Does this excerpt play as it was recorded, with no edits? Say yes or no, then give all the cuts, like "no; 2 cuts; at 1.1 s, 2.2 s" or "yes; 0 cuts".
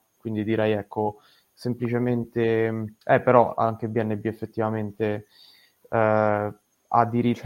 no; 1 cut; at 3.0 s